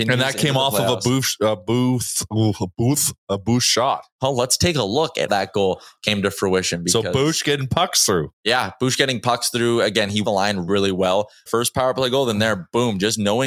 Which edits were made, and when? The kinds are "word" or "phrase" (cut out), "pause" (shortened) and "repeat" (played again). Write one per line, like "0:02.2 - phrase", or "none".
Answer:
0:04.1 - pause
0:05.3 - word
0:08.3 - pause
0:10.2 - word
0:10.7 - word
0:11.5 - phrase